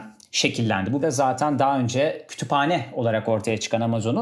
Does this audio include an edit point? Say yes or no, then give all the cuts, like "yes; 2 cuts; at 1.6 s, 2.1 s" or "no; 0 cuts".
yes; 1 cut; at 1.0 s